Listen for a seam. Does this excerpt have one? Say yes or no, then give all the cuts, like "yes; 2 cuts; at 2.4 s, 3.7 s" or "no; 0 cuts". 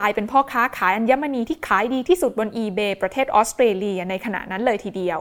no; 0 cuts